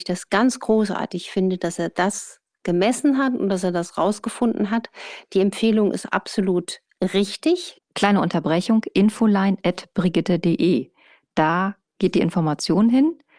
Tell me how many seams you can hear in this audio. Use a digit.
0